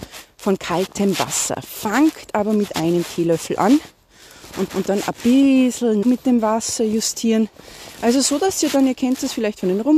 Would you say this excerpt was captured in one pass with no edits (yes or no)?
no